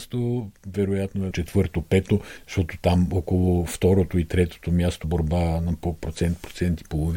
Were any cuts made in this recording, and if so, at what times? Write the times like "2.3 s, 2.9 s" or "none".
1.3 s, 5.0 s